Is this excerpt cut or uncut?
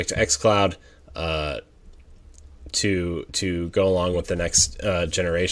uncut